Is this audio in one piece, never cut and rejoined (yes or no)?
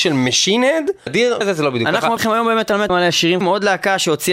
no